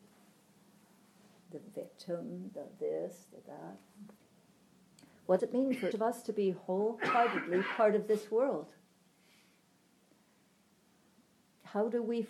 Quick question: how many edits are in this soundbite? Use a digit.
2